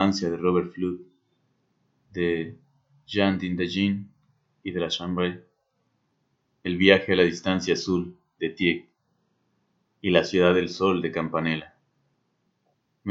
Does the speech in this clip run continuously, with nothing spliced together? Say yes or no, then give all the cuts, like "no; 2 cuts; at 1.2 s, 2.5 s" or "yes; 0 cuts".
yes; 0 cuts